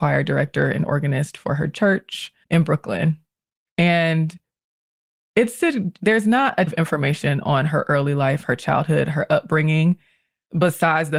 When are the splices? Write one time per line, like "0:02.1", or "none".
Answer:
0:02.4
0:06.7